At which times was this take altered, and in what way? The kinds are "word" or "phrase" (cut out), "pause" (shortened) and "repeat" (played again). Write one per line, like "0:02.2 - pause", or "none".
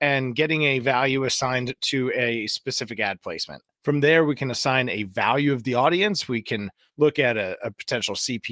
none